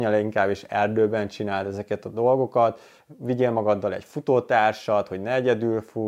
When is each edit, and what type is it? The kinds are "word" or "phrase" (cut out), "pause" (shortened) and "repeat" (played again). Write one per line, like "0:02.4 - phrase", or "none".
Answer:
none